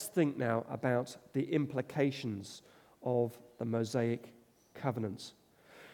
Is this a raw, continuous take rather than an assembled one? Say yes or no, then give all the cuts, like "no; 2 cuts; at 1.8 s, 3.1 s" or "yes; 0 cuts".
yes; 0 cuts